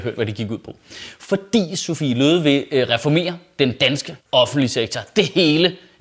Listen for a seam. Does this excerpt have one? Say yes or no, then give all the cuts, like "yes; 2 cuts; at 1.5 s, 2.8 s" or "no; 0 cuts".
yes; 1 cut; at 4.2 s